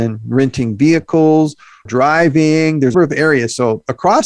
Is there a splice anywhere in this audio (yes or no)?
yes